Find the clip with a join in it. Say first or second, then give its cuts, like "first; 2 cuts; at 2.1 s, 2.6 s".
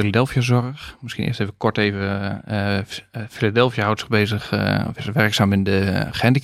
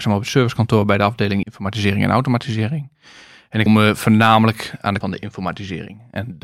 second; 3 cuts; at 1.4 s, 3.7 s, 5.0 s